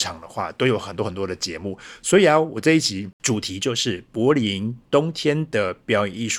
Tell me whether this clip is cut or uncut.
uncut